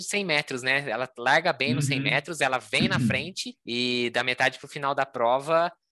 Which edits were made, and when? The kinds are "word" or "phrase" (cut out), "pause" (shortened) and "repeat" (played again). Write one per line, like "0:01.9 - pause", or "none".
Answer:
none

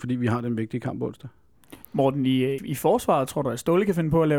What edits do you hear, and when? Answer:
0:01.8 - pause
0:02.6 - word

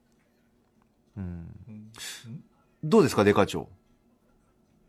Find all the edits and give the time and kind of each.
none

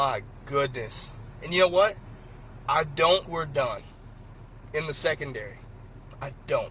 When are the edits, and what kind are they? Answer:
0:03.2 - word

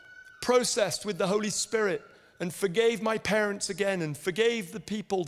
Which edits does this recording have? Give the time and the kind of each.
none

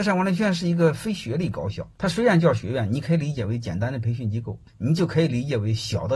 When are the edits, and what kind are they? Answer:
0:01.9 - pause
0:04.7 - pause

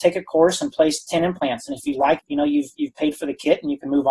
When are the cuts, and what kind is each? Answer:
0:02.2 - word

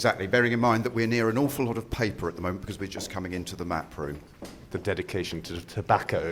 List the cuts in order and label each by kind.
none

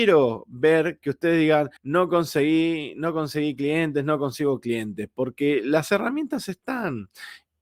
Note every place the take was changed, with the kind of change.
0:01.8 - pause

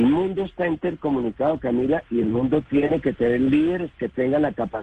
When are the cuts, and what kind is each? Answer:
none

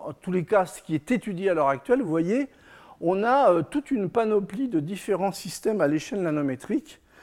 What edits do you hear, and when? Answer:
none

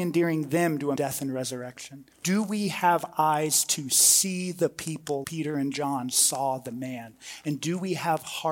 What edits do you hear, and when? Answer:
0:01.0 - phrase
0:02.1 - pause
0:05.2 - word

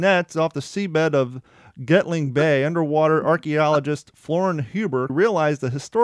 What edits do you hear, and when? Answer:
0:05.1 - word

